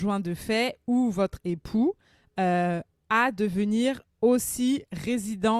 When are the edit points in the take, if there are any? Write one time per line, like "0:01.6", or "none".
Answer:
none